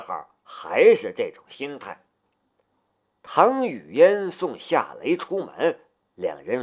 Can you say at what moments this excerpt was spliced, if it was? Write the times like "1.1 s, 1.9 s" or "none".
none